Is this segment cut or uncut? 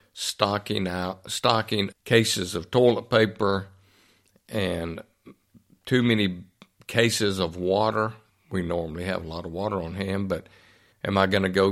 cut